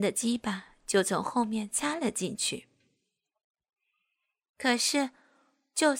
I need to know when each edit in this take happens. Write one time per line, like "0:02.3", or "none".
none